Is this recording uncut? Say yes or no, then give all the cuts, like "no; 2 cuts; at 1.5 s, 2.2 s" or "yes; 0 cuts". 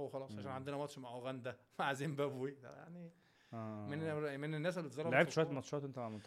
yes; 0 cuts